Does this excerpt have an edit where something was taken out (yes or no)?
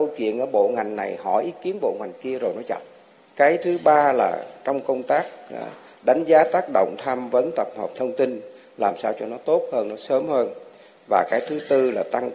no